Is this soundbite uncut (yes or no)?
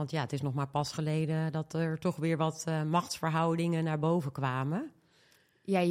yes